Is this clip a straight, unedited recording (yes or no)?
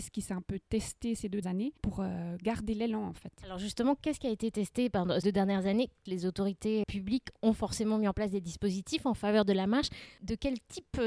no